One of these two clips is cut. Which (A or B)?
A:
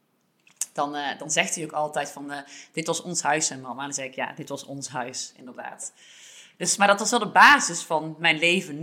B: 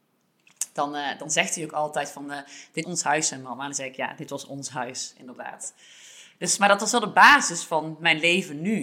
B